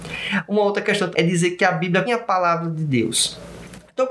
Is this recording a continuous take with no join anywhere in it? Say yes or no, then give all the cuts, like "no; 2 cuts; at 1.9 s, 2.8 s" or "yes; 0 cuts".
no; 2 cuts; at 1.1 s, 2.1 s